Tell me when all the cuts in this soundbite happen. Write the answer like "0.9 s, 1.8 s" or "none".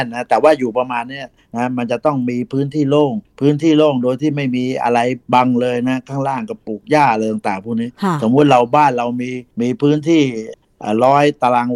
5.2 s, 9.5 s